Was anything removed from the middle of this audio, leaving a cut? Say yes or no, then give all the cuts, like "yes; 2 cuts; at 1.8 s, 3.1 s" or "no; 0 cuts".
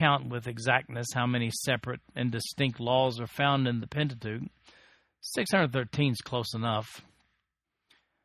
no; 0 cuts